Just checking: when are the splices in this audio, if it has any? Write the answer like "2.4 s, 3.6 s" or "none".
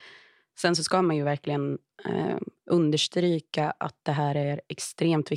none